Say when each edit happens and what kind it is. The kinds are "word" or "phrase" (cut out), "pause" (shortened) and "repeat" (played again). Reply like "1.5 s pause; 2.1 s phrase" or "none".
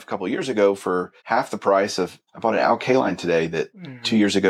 1.2 s pause; 2.3 s pause